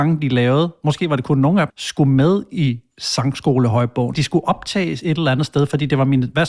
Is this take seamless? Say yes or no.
no